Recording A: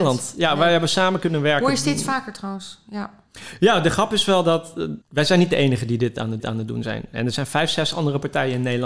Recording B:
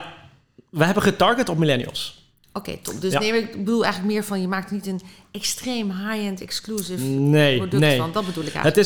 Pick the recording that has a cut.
A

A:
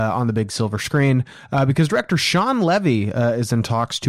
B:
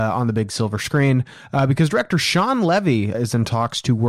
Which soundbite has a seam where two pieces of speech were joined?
B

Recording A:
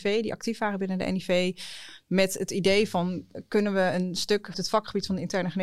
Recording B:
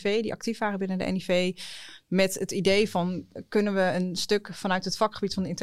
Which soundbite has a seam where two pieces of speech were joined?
A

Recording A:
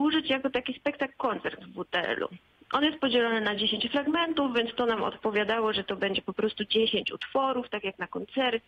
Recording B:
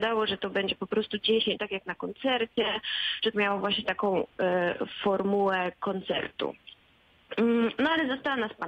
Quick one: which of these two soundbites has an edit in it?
B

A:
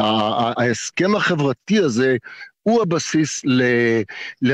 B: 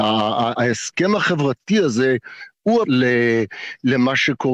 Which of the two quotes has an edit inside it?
B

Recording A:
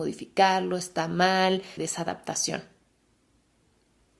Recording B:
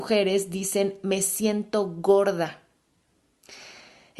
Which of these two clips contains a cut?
A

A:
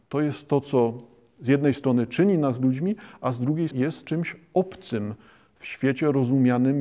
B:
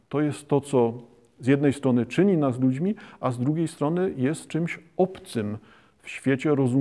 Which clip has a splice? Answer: A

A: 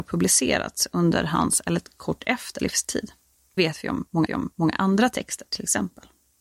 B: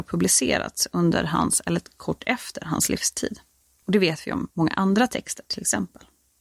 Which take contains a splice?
A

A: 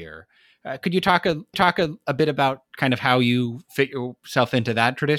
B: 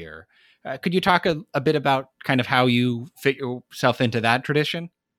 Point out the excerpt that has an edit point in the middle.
A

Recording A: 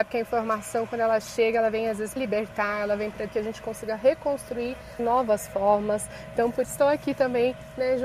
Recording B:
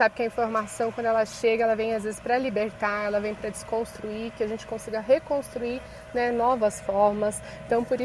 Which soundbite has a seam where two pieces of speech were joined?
A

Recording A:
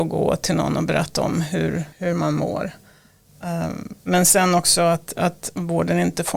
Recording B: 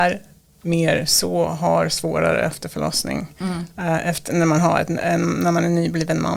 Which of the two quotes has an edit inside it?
A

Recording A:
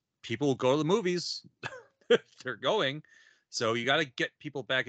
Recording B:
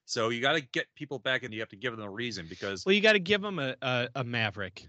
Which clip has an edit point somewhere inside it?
B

